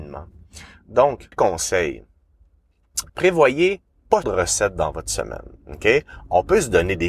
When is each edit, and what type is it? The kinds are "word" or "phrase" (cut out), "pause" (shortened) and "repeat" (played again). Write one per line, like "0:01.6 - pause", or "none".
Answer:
0:01.3 - phrase
0:03.1 - pause
0:04.2 - word
0:05.6 - pause